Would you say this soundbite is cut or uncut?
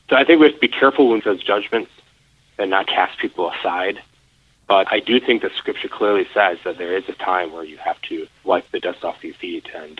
cut